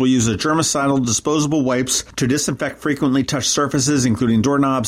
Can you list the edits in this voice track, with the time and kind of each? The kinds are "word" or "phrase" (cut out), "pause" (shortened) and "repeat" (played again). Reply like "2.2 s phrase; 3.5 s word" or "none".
none